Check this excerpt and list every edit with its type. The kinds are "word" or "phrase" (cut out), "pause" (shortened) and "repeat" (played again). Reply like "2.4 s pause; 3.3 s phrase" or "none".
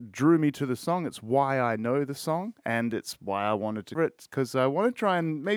2.6 s pause; 3.9 s word